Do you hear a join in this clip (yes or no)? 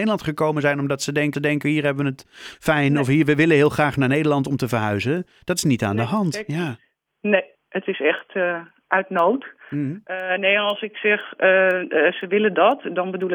yes